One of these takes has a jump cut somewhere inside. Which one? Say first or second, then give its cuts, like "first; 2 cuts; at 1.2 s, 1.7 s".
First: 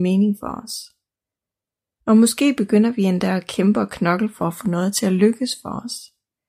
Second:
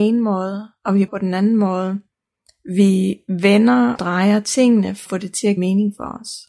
second; 4 cuts; at 1.1 s, 4.0 s, 5.1 s, 5.6 s